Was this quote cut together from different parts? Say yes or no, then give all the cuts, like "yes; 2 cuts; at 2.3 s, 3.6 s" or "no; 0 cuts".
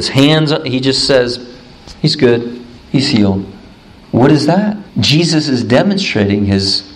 yes; 4 cuts; at 2.0 s, 2.8 s, 4.0 s, 4.9 s